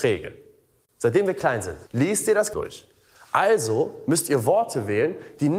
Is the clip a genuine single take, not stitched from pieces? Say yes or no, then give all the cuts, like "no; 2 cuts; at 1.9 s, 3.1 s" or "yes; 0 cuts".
no; 2 cuts; at 1.9 s, 2.5 s